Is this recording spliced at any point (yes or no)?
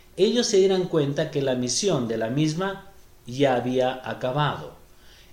no